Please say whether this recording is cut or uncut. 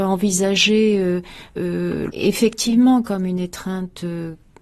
cut